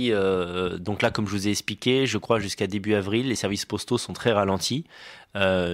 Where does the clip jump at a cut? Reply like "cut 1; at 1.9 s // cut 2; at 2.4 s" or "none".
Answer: none

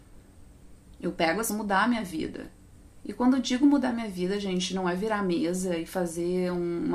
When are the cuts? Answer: cut 1; at 1.5 s

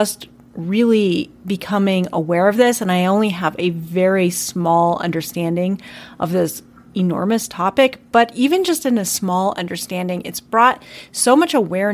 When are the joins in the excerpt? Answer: none

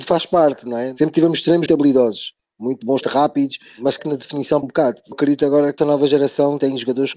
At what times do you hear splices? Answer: cut 1; at 1.7 s // cut 2; at 3.0 s // cut 3; at 4.0 s // cut 4; at 4.6 s // cut 5; at 5.1 s // cut 6; at 5.8 s

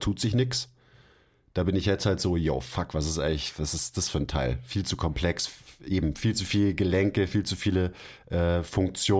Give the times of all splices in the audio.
none

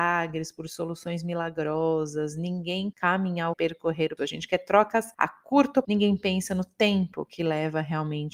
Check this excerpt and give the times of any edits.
cut 1; at 2.9 s // cut 2; at 3.5 s // cut 3; at 4.2 s // cut 4; at 5.1 s // cut 5; at 5.8 s

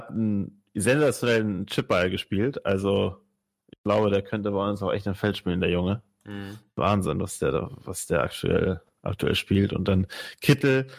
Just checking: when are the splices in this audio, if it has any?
none

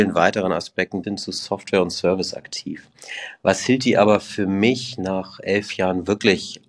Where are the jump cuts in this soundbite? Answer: cut 1; at 1.0 s

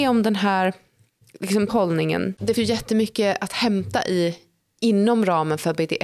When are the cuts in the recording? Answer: cut 1; at 1.7 s // cut 2; at 2.6 s

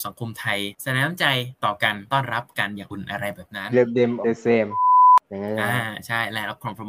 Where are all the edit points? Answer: cut 1; at 3.7 s // cut 2; at 4.2 s

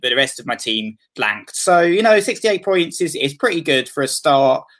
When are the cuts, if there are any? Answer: cut 1; at 1.0 s

